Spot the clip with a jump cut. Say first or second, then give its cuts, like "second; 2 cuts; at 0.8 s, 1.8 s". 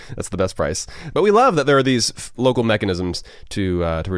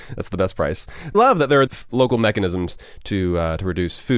second; 2 cuts; at 1.1 s, 1.7 s